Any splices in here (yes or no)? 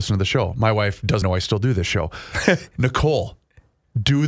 yes